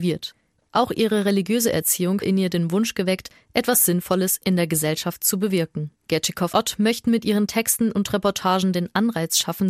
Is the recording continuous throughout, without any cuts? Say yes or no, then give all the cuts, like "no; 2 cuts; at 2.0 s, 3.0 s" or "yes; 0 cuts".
no; 2 cuts; at 2.2 s, 6.5 s